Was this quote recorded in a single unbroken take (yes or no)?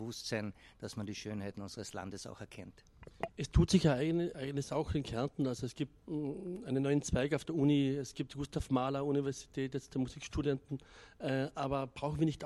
no